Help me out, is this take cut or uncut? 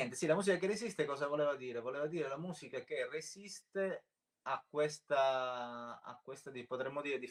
uncut